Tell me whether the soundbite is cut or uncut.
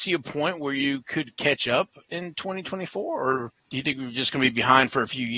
cut